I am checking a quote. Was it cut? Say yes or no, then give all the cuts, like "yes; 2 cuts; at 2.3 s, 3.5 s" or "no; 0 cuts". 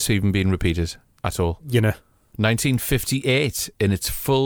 no; 0 cuts